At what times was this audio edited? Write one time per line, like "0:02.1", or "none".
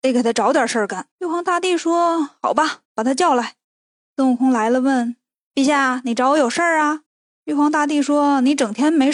0:01.1
0:02.8
0:03.6
0:07.1